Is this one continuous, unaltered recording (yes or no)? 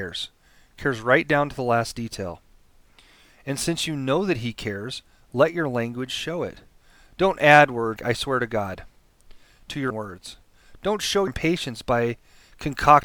no